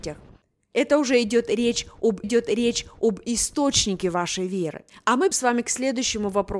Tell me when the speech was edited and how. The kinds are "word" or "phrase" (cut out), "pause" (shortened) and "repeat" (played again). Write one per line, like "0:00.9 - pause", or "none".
0:02.2 - repeat
0:04.9 - pause
0:05.3 - word